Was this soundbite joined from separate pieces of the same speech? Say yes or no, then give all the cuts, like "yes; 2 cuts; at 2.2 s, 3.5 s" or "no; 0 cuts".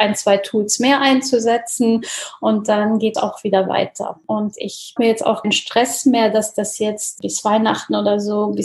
yes; 4 cuts; at 3.1 s, 5.0 s, 5.4 s, 7.2 s